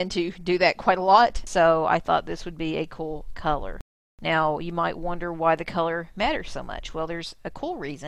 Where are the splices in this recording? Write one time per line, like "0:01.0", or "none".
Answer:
none